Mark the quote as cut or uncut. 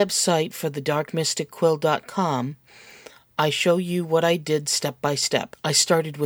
uncut